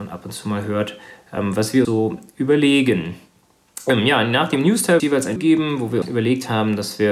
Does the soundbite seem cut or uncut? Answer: cut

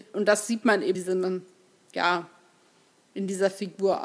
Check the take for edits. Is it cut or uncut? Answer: cut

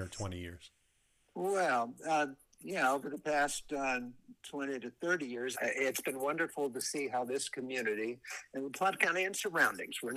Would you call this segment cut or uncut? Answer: cut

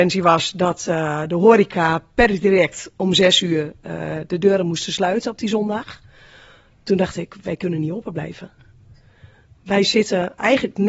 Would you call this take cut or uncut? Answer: uncut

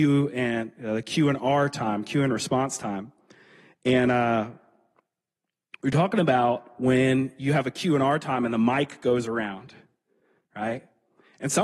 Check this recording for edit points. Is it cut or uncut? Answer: uncut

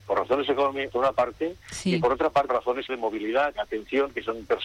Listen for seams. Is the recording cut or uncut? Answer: cut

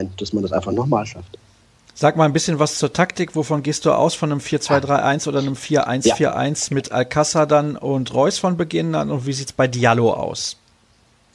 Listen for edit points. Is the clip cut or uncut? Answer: uncut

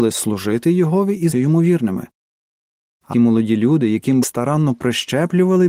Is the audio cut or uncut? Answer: cut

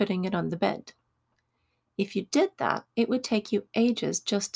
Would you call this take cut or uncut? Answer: cut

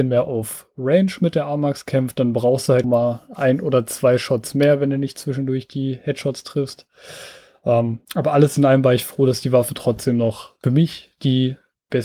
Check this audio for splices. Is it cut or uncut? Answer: cut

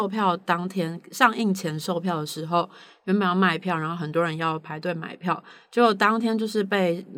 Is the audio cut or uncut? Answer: uncut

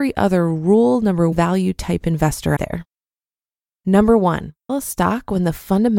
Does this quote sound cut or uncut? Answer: cut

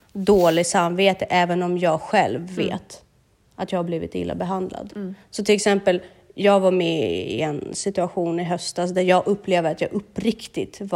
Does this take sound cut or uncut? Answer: uncut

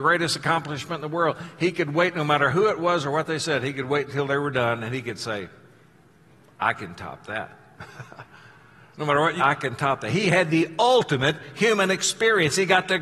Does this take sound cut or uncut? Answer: cut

